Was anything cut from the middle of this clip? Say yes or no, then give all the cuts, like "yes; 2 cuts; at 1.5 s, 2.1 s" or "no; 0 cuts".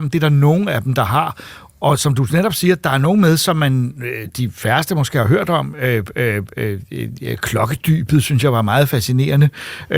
no; 0 cuts